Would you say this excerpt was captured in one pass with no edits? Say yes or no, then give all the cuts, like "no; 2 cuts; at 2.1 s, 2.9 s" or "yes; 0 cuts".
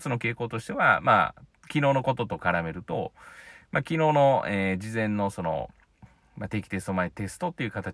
yes; 0 cuts